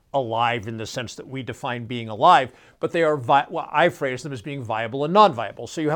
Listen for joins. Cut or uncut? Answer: uncut